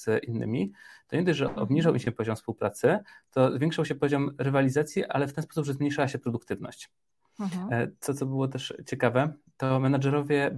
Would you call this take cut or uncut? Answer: cut